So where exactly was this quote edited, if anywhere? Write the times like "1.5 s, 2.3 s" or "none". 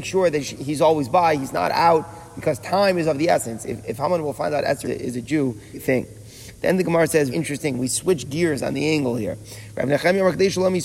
4.8 s, 5.7 s, 7.3 s